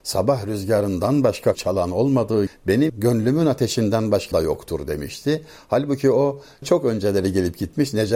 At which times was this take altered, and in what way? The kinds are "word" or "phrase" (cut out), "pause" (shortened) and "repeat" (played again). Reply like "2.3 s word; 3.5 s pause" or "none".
1.5 s word; 2.5 s word; 2.9 s word; 4.3 s word; 6.6 s word